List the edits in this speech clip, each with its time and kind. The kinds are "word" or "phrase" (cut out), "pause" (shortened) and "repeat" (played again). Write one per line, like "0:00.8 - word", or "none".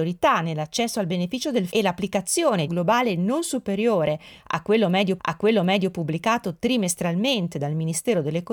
0:01.7 - word
0:02.7 - phrase
0:05.2 - repeat